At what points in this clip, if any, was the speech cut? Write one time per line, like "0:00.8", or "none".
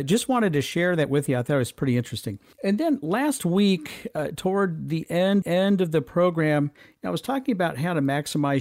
0:02.5
0:05.4